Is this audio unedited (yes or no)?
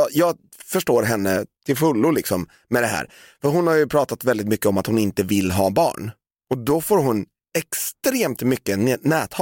yes